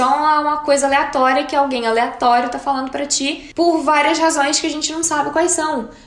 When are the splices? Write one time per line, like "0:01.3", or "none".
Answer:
none